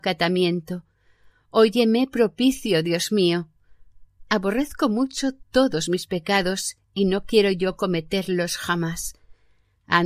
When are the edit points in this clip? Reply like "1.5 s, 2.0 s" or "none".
none